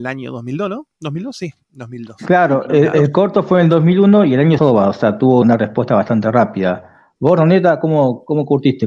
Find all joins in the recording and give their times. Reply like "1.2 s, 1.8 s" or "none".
4.6 s, 5.4 s